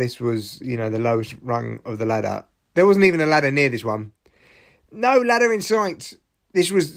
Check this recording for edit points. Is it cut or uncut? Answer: uncut